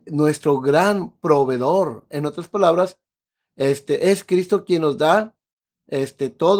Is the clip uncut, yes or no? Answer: yes